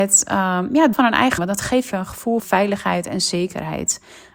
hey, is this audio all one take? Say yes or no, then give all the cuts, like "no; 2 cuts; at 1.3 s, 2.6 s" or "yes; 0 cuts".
no; 4 cuts; at 0.9 s, 1.4 s, 1.9 s, 2.4 s